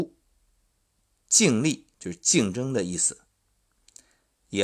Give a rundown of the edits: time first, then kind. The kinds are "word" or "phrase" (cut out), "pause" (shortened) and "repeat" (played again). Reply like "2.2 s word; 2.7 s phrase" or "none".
1.9 s pause